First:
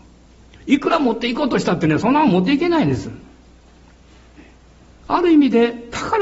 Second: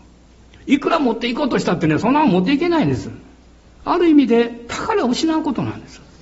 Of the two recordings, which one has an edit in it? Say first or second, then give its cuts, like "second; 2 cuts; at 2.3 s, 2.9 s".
second; 1 cut; at 3.6 s